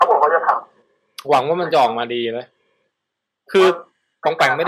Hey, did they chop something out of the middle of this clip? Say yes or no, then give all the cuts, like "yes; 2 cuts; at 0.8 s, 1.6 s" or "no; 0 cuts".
no; 0 cuts